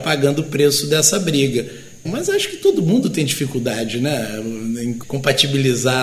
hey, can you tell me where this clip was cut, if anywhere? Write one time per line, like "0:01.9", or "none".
none